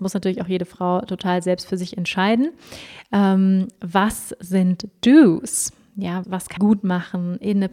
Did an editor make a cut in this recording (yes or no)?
yes